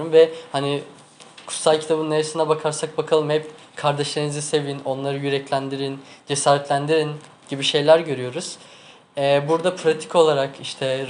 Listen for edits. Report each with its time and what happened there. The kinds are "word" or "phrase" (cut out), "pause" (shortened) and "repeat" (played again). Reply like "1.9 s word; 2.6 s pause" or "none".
none